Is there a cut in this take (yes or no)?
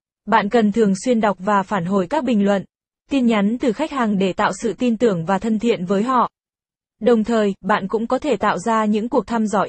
no